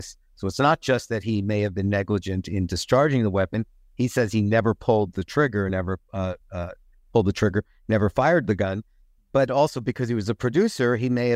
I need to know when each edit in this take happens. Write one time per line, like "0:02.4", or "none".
none